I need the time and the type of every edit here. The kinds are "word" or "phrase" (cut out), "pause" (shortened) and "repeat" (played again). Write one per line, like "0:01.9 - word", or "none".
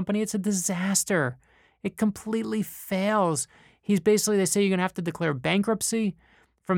none